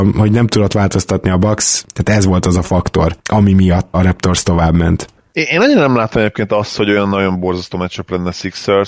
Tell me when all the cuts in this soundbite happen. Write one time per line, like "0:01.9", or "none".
0:03.9